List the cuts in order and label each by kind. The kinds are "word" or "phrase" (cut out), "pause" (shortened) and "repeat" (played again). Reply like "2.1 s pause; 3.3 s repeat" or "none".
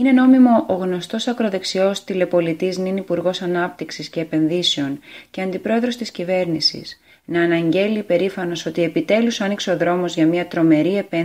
none